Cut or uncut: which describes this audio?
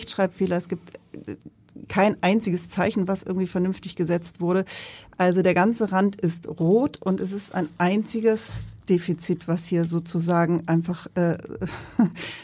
cut